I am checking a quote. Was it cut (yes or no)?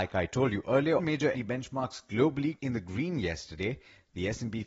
yes